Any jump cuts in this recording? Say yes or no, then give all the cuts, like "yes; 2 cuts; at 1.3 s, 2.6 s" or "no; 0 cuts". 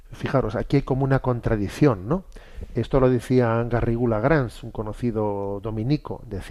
no; 0 cuts